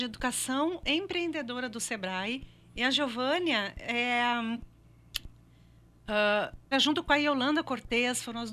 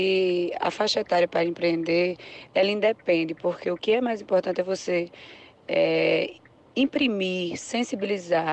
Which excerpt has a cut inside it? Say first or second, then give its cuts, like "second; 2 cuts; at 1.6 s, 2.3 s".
first; 1 cut; at 6.7 s